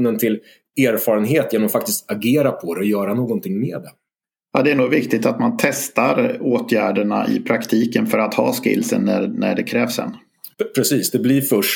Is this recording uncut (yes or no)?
no